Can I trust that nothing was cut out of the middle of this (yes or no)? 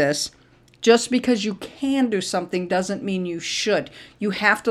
yes